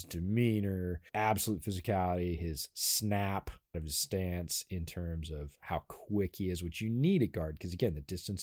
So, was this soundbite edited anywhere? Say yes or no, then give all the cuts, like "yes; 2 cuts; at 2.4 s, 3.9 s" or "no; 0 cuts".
yes; 2 cuts; at 1.1 s, 3.7 s